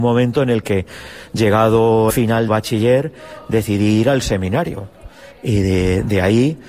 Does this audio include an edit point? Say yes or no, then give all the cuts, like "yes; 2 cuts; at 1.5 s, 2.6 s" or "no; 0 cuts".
yes; 3 cuts; at 2.1 s, 2.5 s, 5.3 s